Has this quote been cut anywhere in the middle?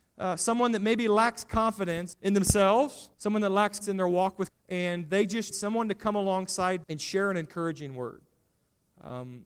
yes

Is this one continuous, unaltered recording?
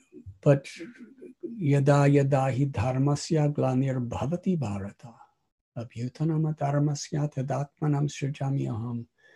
yes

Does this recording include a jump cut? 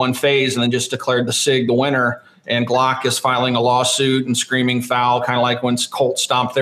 no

